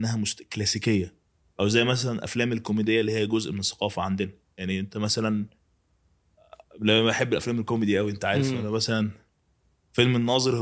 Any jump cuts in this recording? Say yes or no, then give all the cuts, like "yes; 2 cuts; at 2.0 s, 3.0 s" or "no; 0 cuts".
no; 0 cuts